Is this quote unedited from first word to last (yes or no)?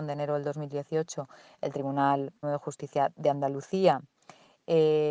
no